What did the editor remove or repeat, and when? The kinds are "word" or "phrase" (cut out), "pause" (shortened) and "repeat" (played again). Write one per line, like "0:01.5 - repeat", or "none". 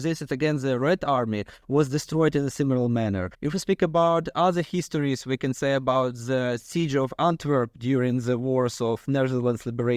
0:03.3 - pause